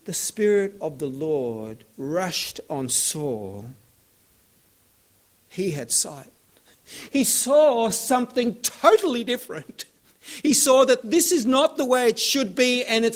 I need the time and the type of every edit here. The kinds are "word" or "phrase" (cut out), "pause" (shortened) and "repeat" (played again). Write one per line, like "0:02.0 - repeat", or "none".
none